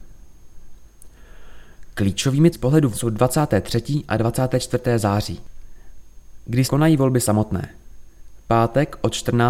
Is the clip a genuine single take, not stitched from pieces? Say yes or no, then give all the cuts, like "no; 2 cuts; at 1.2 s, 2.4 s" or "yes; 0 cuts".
no; 3 cuts; at 2.5 s, 2.9 s, 6.7 s